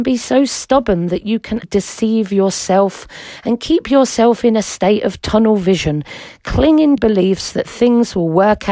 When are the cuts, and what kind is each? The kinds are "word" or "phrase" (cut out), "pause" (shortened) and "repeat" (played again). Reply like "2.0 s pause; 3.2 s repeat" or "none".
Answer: 1.6 s word; 7.0 s word